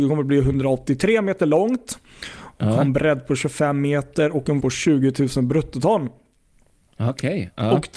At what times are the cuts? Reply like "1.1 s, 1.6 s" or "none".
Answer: 4.6 s